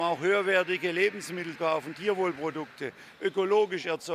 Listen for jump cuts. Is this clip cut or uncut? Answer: cut